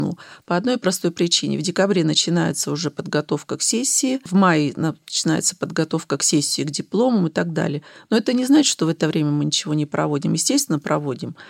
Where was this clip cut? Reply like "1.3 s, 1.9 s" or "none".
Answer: none